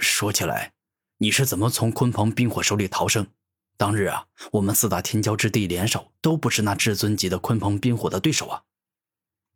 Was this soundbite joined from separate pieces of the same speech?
no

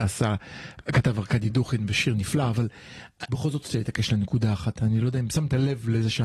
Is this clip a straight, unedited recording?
no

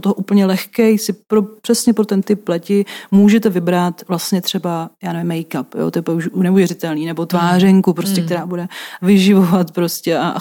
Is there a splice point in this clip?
no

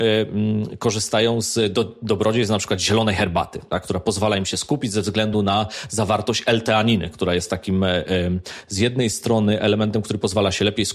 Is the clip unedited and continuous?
yes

